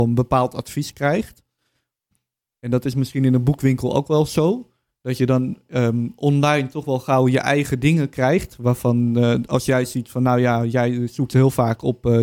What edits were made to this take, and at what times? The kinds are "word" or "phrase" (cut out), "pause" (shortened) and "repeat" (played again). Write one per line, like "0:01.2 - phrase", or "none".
none